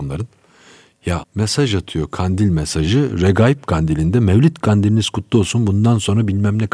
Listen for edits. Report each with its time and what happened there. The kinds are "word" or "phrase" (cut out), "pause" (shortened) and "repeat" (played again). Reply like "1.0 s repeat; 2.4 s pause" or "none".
1.2 s word